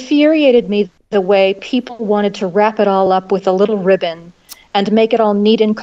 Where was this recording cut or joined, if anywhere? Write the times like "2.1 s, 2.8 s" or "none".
none